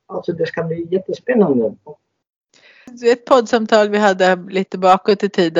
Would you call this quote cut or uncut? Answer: uncut